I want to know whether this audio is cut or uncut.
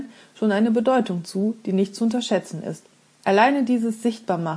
cut